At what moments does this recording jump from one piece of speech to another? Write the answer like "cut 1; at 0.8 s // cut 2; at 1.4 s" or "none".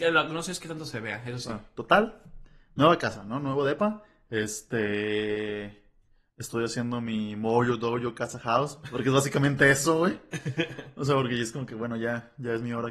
none